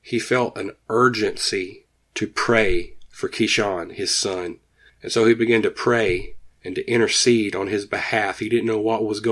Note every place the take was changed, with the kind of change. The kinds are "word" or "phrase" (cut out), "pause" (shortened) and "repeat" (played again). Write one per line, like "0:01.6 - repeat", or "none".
none